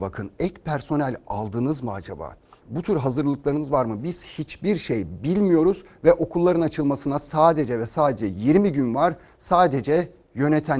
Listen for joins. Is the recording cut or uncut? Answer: uncut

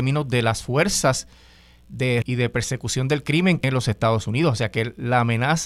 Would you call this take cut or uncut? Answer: cut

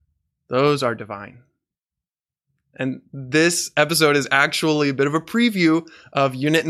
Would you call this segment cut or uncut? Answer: uncut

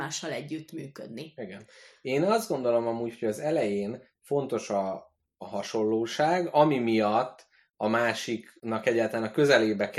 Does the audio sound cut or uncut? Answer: uncut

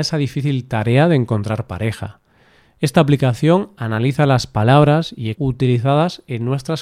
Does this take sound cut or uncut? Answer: cut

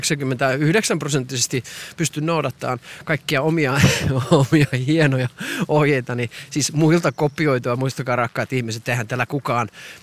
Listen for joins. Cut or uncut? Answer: uncut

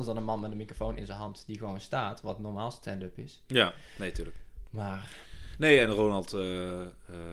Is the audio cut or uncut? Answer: uncut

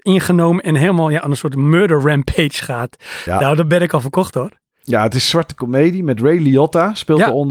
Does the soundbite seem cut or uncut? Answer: uncut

